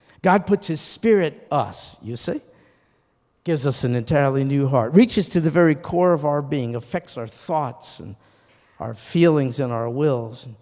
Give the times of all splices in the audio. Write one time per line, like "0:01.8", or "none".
0:01.5